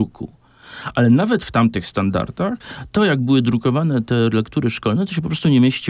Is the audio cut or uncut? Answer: uncut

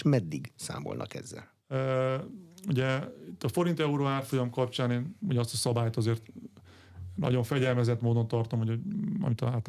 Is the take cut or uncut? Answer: cut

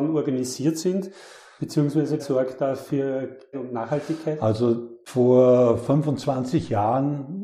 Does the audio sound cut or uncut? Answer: cut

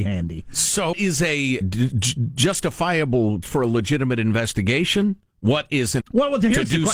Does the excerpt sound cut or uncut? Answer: cut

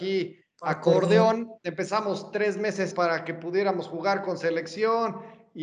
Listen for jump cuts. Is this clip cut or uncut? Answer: cut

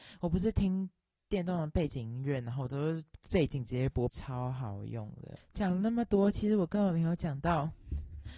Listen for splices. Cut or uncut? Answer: cut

